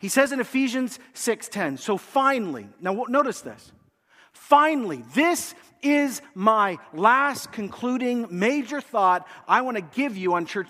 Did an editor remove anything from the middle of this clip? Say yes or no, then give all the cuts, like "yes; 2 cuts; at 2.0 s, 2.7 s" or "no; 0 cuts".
no; 0 cuts